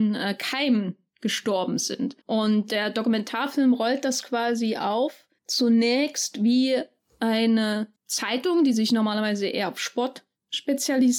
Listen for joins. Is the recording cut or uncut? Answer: cut